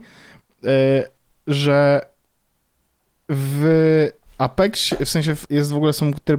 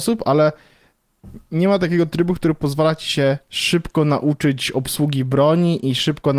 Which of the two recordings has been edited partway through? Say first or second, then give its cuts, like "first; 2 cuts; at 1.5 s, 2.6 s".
first; 1 cut; at 5.5 s